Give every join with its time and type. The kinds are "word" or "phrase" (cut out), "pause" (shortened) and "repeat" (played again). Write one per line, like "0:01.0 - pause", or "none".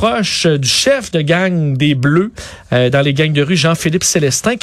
none

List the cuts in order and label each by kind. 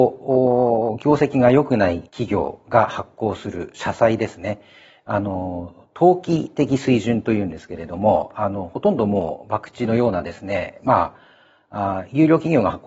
0:02.1 - pause

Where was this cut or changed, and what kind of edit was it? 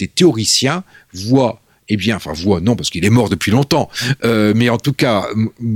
none

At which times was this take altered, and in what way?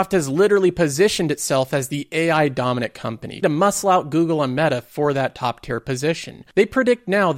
0:03.4 - word

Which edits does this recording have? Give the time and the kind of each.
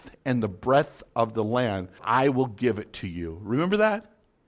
0:02.0 - word

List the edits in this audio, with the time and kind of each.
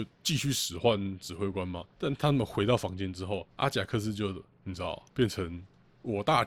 0:01.9 - pause
0:03.5 - pause
0:05.1 - pause

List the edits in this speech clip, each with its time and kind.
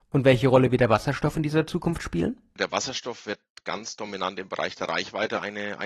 none

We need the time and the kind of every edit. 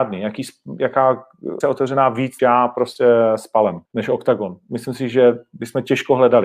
0:01.6 - word
0:02.4 - word
0:03.9 - pause

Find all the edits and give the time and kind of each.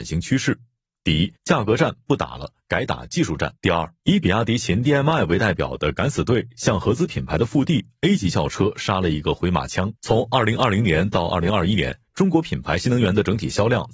0:01.4 - pause
0:03.6 - pause
0:04.0 - pause
0:10.0 - pause

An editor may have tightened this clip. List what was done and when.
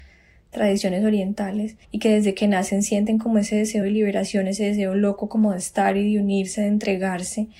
0:01.8 - pause
0:03.8 - phrase

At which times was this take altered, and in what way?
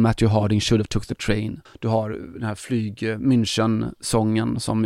0:01.7 - pause

